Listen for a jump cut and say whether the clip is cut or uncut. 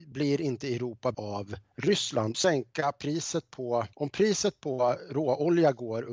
cut